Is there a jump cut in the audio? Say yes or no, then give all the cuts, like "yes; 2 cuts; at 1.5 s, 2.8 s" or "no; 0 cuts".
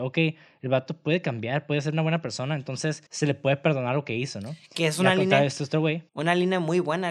yes; 2 cuts; at 3.1 s, 6.1 s